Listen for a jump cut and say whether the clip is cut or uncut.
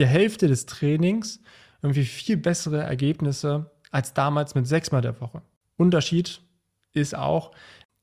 uncut